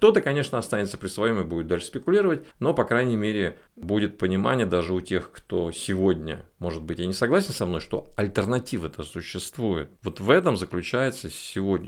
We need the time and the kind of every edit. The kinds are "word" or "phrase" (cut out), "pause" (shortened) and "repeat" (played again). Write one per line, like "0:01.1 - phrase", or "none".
0:02.5 - pause
0:03.7 - pause
0:10.0 - pause